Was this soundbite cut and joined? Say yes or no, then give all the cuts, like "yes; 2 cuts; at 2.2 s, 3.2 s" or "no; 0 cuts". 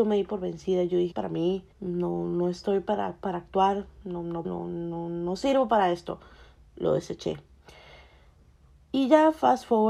yes; 3 cuts; at 1.1 s, 1.7 s, 4.4 s